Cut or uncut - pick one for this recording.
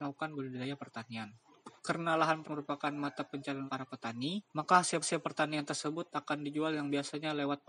cut